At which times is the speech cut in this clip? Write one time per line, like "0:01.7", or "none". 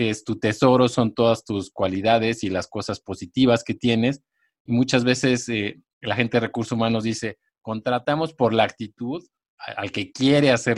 none